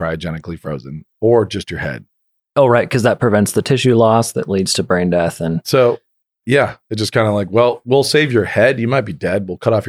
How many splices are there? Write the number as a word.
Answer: zero